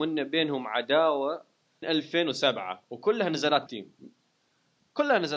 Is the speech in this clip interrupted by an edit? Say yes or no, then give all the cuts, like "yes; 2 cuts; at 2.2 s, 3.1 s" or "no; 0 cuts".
yes; 2 cuts; at 1.8 s, 3.7 s